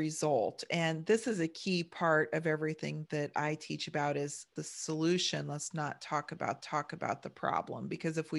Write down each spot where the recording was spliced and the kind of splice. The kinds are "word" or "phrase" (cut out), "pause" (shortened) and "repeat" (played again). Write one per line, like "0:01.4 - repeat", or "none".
0:03.0 - word
0:04.6 - phrase
0:06.6 - repeat